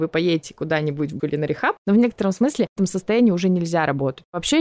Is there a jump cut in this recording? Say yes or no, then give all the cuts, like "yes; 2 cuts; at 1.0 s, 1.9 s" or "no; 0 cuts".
yes; 2 cuts; at 1.2 s, 2.8 s